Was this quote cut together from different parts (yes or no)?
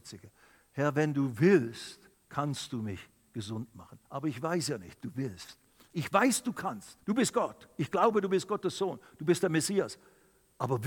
yes